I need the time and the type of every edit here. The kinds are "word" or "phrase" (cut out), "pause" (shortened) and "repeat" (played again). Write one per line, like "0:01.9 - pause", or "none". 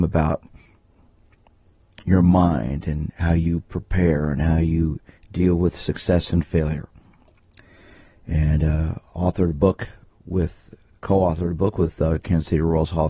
none